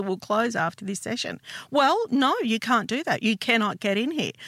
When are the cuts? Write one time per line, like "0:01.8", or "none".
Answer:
none